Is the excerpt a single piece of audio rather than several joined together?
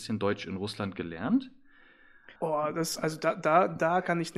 no; 1 cut; at 2.4 s

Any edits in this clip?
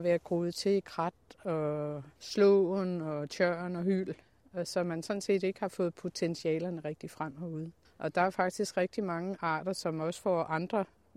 yes; 2 cuts; at 2.2 s, 7.8 s

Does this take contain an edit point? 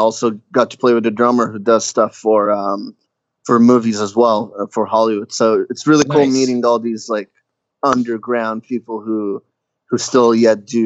no; 0 cuts

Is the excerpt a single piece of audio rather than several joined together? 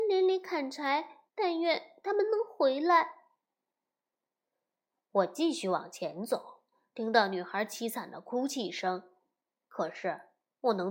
no; 1 cut; at 1.3 s

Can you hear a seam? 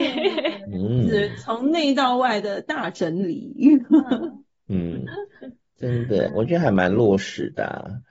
yes; 1 cut; at 6.3 s

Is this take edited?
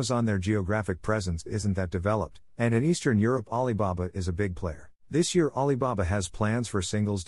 yes; 1 cut; at 5.0 s

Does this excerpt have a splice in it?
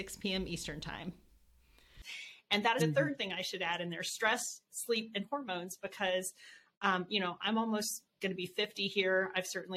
yes; 1 cut; at 2.8 s

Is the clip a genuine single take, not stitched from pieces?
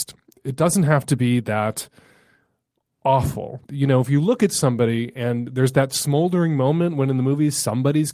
no; 1 cut; at 3.6 s

